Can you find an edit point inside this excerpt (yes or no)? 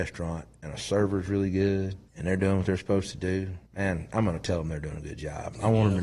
yes